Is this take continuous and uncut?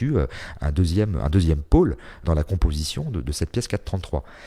no; 1 cut; at 2.2 s

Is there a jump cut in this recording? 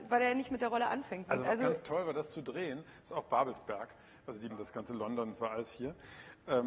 yes; 1 cut; at 4.5 s

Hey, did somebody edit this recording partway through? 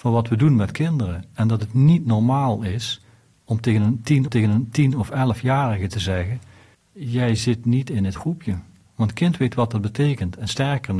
yes; 2 cuts; at 4.3 s, 8.2 s

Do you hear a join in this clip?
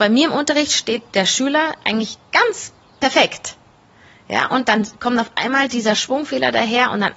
no; 0 cuts

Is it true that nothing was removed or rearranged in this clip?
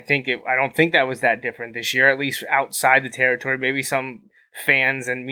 yes; 0 cuts

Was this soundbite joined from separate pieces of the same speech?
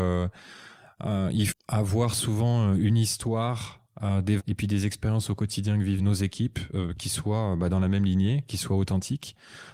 yes; 3 cuts; at 1.5 s, 4.4 s, 6.0 s

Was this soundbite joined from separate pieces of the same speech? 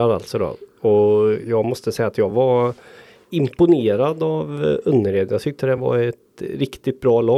no; 0 cuts

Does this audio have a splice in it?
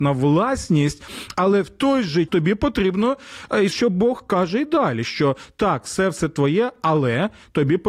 yes; 2 cuts; at 2.3 s, 3.7 s

